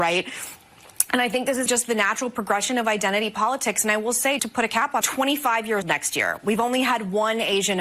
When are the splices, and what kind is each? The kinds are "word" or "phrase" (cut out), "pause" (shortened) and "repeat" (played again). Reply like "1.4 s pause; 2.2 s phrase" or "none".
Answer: 1.7 s word; 4.4 s word; 5.0 s phrase; 5.8 s word